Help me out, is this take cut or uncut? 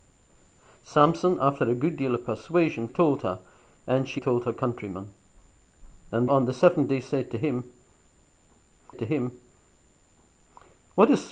cut